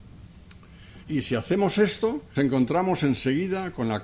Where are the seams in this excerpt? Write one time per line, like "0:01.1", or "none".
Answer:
0:01.0
0:02.4